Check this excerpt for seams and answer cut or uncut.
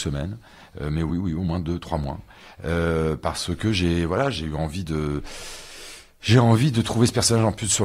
uncut